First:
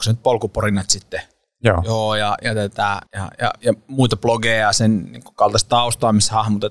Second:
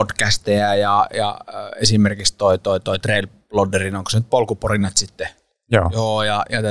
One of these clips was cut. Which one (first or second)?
first